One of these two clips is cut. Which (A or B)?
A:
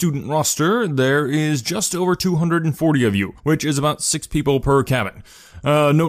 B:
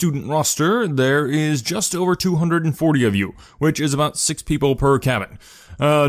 A